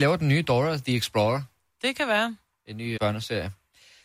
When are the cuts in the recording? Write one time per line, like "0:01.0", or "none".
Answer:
0:03.0